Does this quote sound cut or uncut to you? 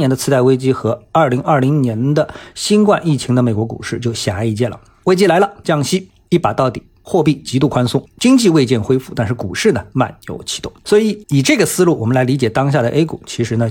cut